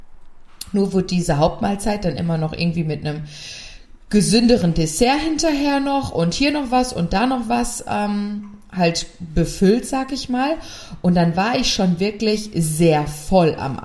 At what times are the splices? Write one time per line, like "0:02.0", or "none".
none